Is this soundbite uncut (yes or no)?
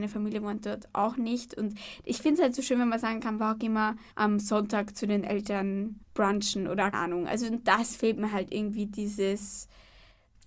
no